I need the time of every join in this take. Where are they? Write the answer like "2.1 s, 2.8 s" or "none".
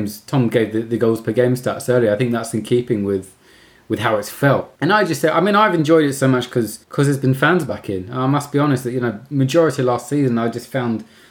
4.8 s, 6.8 s